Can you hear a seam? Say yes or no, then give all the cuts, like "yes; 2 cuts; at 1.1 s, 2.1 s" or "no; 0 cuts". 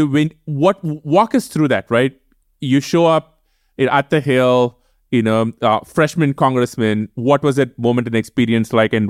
no; 0 cuts